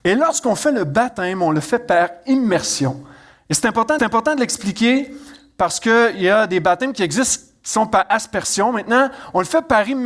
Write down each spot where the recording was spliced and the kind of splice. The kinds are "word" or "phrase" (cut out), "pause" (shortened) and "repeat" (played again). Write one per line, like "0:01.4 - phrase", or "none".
0:04.0 - repeat

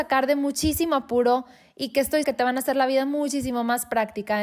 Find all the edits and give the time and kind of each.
0:02.2 - word

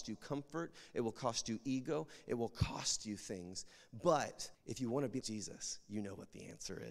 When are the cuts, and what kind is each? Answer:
0:04.5 - pause
0:05.2 - word

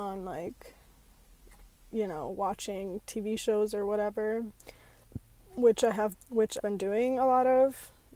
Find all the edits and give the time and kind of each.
0:06.1 - word
0:06.6 - word

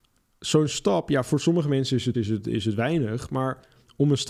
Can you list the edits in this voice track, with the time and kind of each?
0:02.1 - phrase

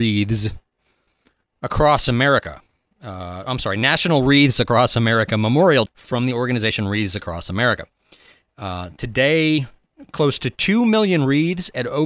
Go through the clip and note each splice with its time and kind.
0:05.9 - word

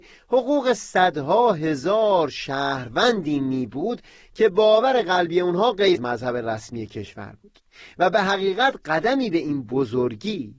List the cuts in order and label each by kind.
0:05.9 - word

